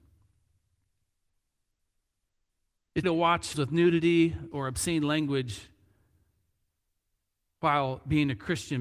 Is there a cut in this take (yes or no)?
yes